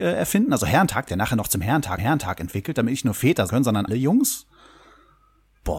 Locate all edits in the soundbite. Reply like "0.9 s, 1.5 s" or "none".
1.1 s, 2.0 s, 3.5 s, 3.9 s